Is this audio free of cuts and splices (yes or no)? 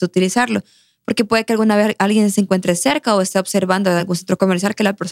yes